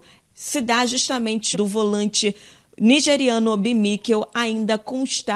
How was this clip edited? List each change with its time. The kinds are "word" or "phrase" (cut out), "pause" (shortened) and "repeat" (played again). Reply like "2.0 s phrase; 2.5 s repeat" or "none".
1.5 s phrase